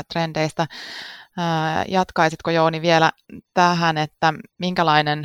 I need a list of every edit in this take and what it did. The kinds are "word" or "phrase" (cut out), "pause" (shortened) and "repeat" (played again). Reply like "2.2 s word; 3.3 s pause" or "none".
none